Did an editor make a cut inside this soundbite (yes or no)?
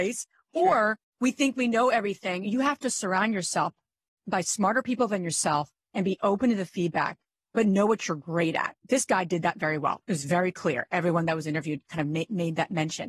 no